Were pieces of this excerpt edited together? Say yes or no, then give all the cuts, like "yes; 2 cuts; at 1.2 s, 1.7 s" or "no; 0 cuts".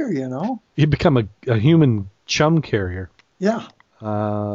no; 0 cuts